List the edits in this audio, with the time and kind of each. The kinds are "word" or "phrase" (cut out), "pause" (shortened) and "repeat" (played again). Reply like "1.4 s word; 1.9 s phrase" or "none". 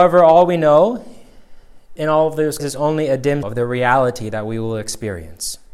2.0 s word; 2.6 s word; 3.4 s word